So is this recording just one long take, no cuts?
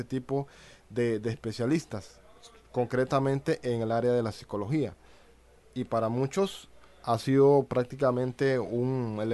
yes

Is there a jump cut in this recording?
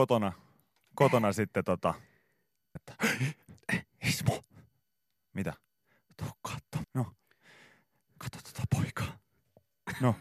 yes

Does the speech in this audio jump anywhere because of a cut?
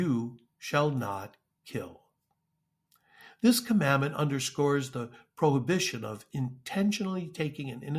no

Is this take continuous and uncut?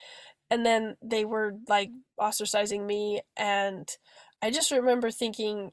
yes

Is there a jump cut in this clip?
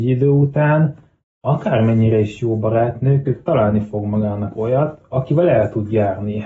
no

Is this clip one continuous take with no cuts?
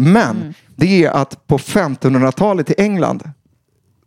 yes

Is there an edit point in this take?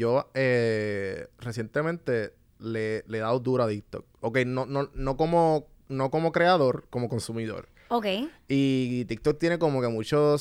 no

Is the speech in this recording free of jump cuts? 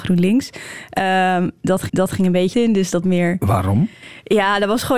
no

